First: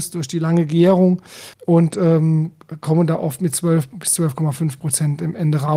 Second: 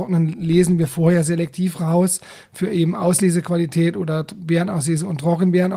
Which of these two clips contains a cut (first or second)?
first